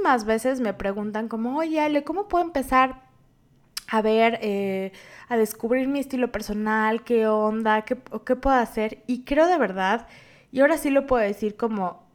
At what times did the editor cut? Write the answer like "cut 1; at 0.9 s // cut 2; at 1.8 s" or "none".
none